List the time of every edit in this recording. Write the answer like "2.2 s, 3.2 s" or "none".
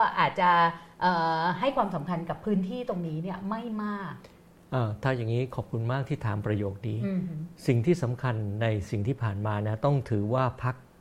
7.6 s

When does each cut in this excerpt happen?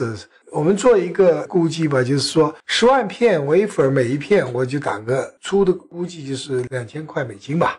2.6 s

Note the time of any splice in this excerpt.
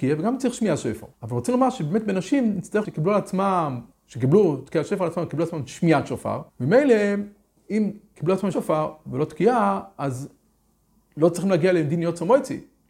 1.1 s, 2.8 s, 3.9 s, 6.5 s, 8.5 s

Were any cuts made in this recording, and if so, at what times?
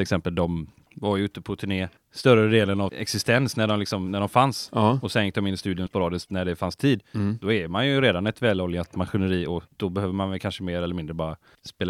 2.9 s, 5.9 s, 9.7 s

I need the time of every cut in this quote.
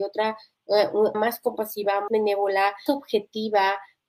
1.1 s, 2.1 s, 2.9 s

